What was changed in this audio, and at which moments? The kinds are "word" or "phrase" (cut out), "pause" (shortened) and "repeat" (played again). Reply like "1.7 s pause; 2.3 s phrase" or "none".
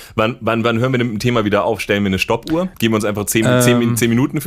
2.7 s pause